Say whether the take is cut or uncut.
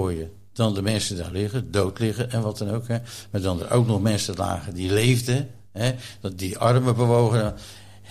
uncut